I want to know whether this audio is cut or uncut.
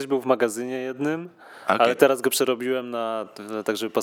uncut